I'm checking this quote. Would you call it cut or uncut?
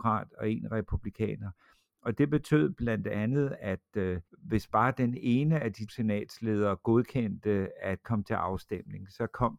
cut